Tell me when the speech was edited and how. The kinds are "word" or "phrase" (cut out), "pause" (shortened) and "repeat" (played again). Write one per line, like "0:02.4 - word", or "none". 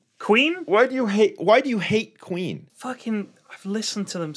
0:02.7 - pause